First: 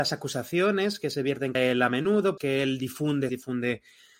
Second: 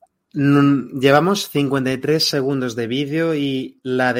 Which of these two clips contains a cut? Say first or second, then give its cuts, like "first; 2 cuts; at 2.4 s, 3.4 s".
first; 3 cuts; at 1.5 s, 2.4 s, 3.3 s